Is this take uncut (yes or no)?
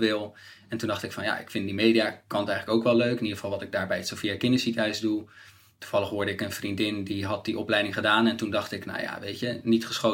yes